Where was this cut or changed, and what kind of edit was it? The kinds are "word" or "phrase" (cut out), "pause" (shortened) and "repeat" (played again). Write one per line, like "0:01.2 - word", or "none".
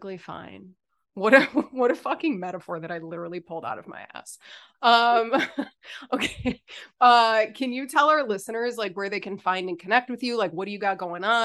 none